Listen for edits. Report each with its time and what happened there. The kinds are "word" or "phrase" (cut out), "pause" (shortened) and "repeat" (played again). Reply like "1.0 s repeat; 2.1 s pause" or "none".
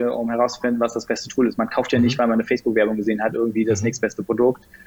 none